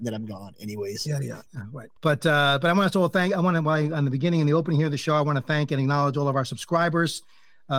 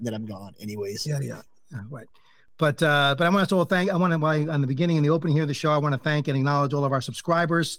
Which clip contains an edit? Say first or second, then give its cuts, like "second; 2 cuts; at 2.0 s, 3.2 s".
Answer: first; 2 cuts; at 1.5 s, 2.0 s